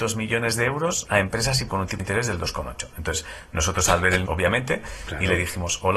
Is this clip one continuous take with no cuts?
no; 3 cuts; at 1.7 s, 2.0 s, 4.2 s

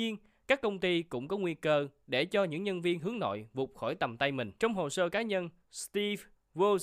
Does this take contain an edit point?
yes; 1 cut; at 4.6 s

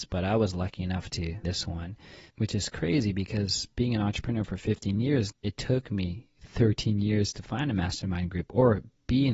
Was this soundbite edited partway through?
yes; 3 cuts; at 1.4 s, 2.3 s, 5.3 s

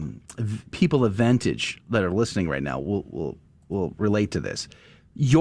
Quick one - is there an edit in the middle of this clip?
no; 0 cuts

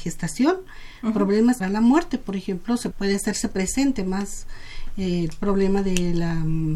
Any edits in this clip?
yes; 2 cuts; at 1.6 s, 2.9 s

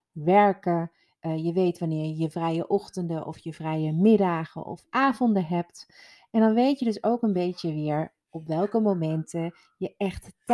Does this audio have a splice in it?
no; 0 cuts

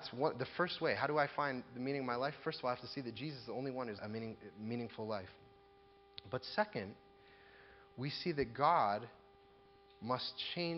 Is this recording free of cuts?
no; 1 cut; at 4.0 s

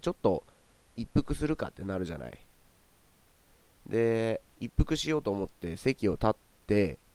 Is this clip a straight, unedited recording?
no; 1 cut; at 4.5 s

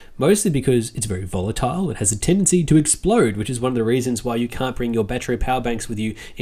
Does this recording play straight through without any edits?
yes; 0 cuts

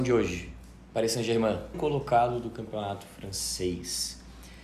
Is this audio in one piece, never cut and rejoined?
no; 1 cut; at 1.7 s

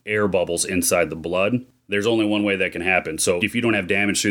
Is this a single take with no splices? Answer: yes; 0 cuts

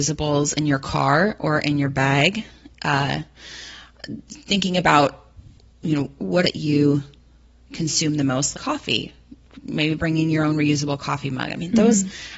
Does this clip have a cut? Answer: yes; 2 cuts; at 6.4 s, 8.5 s

